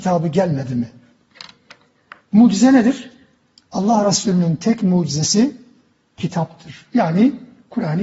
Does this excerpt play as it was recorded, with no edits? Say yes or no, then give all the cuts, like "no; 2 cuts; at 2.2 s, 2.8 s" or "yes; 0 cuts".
yes; 0 cuts